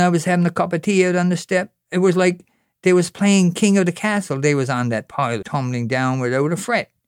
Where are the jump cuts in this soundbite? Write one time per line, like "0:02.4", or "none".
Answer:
0:05.4